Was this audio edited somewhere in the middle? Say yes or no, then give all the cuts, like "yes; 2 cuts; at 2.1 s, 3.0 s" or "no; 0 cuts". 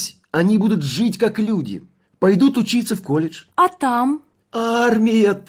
no; 0 cuts